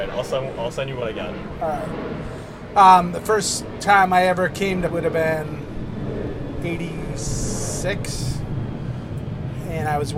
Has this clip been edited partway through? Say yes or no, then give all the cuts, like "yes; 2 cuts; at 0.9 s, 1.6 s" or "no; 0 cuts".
yes; 1 cut; at 4.9 s